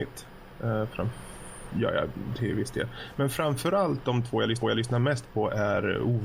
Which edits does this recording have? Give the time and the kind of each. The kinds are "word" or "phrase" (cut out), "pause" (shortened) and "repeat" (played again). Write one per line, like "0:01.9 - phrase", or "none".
0:04.6 - repeat